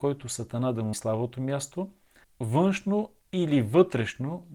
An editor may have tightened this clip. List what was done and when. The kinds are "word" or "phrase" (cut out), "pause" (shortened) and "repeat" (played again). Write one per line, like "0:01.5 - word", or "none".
0:00.9 - word
0:02.2 - word